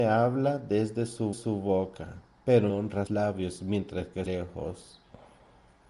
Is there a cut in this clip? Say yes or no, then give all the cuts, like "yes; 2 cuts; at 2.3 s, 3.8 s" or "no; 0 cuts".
yes; 4 cuts; at 1.3 s, 2.7 s, 3.1 s, 4.3 s